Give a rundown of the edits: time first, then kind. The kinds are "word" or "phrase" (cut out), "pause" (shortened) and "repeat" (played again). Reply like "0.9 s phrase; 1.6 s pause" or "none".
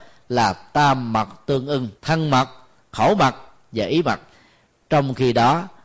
2.0 s pause